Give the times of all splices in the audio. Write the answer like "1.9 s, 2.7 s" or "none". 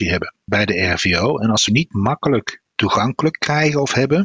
1.7 s